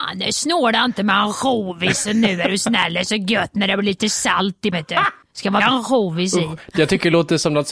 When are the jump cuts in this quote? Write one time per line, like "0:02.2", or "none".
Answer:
0:04.7
0:05.2
0:05.6